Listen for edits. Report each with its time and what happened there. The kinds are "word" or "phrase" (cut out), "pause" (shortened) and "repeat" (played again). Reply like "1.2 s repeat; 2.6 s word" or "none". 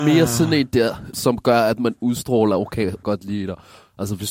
1.1 s word; 3.0 s phrase